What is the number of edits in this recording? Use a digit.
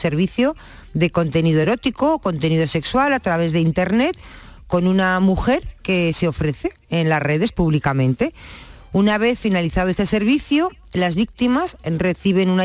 0